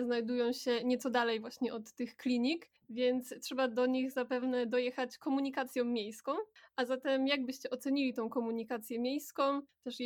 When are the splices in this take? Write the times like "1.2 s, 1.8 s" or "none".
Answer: none